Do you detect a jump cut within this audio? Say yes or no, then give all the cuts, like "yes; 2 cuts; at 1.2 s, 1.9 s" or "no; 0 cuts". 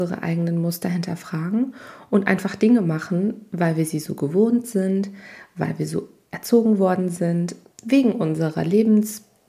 yes; 1 cut; at 7.7 s